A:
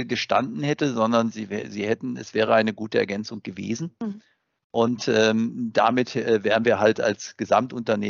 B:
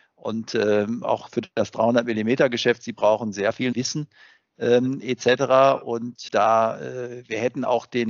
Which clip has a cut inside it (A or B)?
B